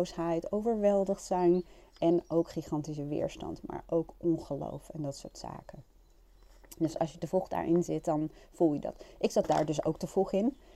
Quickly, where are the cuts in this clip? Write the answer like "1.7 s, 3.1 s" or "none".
none